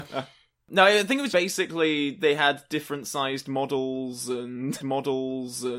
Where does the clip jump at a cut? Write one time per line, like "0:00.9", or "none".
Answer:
0:01.3
0:04.8